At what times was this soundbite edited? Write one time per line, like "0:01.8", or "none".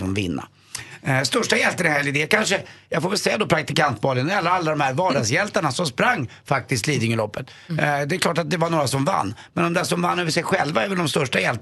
none